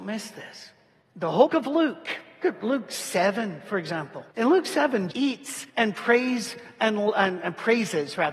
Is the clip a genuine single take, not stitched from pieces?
no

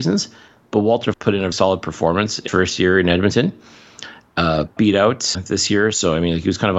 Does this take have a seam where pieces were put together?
yes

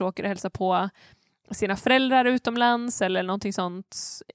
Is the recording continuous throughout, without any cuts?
yes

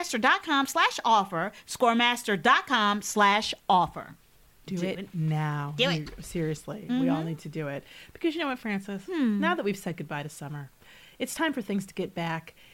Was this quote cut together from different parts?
no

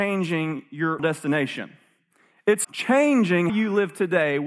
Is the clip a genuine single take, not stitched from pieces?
no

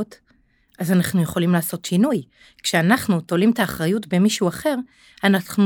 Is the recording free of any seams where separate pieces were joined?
yes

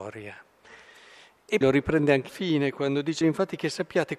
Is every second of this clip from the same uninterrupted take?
no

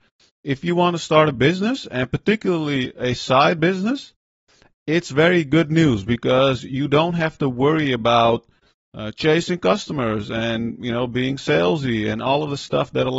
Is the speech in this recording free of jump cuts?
yes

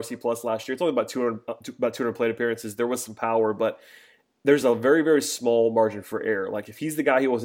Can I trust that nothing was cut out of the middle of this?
yes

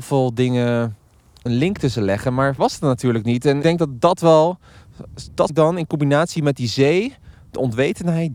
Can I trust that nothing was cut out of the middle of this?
no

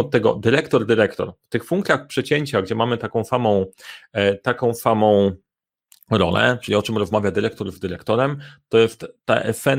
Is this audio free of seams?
yes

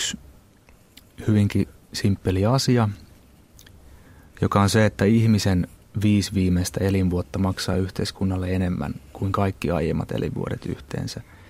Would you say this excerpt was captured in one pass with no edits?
yes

